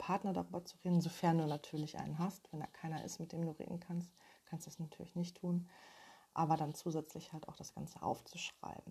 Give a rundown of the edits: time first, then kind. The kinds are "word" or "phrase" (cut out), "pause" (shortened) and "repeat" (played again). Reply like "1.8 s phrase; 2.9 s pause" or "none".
none